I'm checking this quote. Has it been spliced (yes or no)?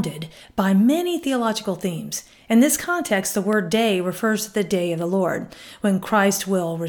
no